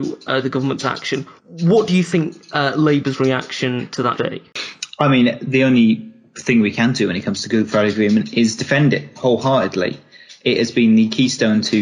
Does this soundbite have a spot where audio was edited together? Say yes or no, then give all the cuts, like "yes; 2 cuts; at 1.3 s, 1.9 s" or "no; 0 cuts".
yes; 2 cuts; at 1.4 s, 4.2 s